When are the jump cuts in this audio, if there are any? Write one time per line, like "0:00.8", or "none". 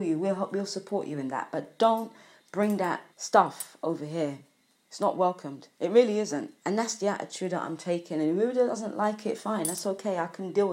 0:03.1
0:06.6